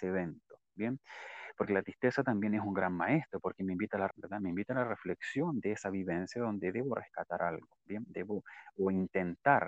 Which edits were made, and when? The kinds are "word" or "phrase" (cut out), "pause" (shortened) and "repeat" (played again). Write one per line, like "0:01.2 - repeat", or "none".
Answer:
0:04.1 - word

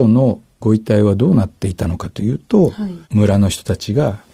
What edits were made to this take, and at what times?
0:03.0 - pause

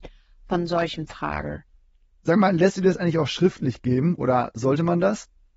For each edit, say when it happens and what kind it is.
none

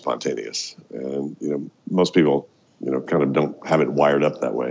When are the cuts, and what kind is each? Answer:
none

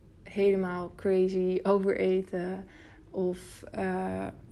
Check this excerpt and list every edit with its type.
none

